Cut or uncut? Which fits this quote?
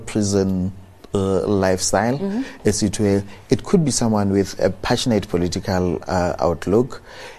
uncut